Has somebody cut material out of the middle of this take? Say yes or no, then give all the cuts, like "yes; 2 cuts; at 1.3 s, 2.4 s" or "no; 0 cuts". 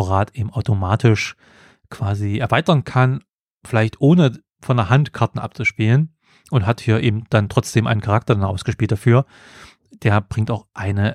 no; 0 cuts